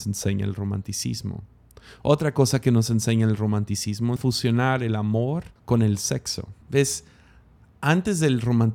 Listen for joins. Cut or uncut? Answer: cut